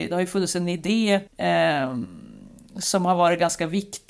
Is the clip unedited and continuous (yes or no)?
no